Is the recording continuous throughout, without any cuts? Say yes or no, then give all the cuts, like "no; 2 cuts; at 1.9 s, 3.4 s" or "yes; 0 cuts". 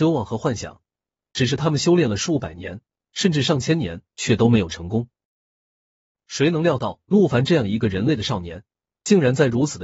yes; 0 cuts